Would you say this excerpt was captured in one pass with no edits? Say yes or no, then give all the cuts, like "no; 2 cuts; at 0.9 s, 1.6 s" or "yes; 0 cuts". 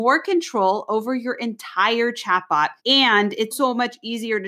no; 2 cuts; at 2.8 s, 3.5 s